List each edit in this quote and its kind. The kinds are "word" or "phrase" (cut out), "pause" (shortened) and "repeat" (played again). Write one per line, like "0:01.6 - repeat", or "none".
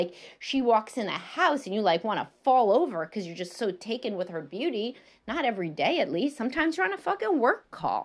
none